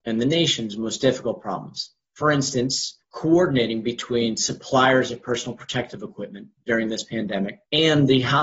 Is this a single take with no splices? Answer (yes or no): no